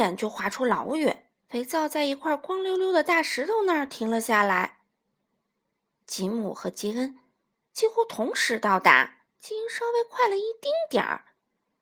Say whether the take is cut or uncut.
cut